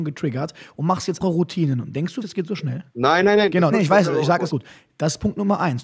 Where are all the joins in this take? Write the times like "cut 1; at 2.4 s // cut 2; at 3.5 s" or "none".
cut 1; at 1.2 s // cut 2; at 2.2 s // cut 3; at 2.9 s // cut 4; at 3.7 s // cut 5; at 4.5 s

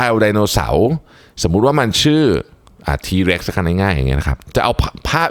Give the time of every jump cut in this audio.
none

